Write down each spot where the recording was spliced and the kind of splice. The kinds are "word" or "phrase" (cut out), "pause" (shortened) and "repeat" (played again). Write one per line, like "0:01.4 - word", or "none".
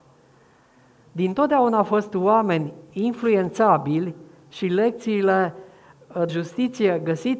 0:06.3 - word